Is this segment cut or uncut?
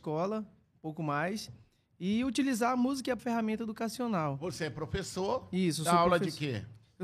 cut